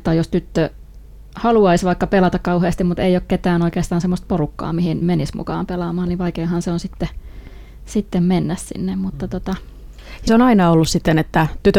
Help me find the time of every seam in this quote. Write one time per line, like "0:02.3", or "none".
0:05.0
0:10.3

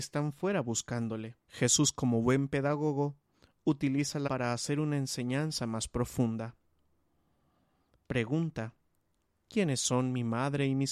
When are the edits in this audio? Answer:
0:01.4
0:04.3

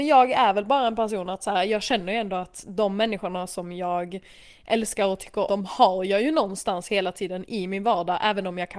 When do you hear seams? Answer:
0:05.5

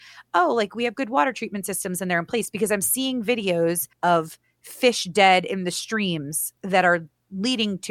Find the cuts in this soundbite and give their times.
0:03.9
0:06.6

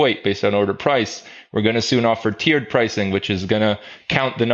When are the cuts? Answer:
none

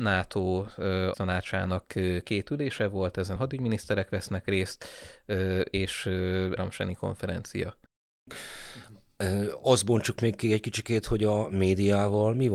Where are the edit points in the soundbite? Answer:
0:01.1
0:03.4
0:06.6

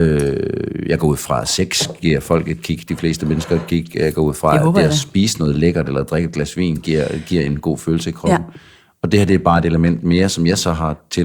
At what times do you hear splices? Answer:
none

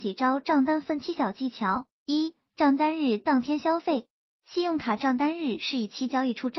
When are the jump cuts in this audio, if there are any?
none

